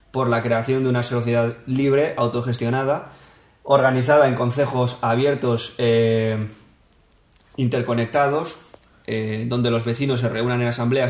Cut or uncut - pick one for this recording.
uncut